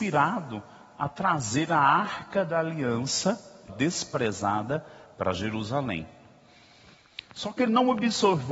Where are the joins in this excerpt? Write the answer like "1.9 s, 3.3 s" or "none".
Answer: 3.7 s